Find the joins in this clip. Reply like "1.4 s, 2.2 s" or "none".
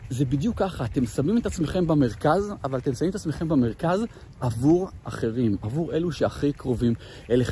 5.0 s